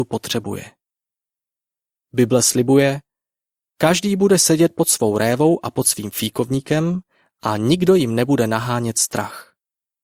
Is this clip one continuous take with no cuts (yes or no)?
yes